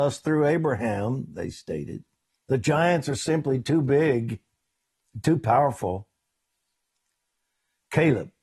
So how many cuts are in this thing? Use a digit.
1